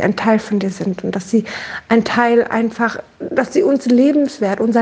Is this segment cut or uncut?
uncut